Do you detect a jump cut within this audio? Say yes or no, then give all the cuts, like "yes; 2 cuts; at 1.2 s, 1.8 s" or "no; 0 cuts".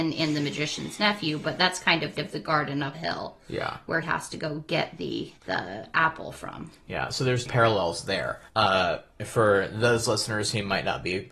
yes; 6 cuts; at 2.2 s, 2.9 s, 4.0 s, 5.4 s, 7.5 s, 8.5 s